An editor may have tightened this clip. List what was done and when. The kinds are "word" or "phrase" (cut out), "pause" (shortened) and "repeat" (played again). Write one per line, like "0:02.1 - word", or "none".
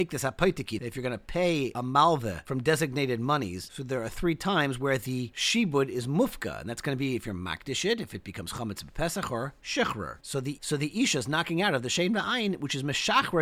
none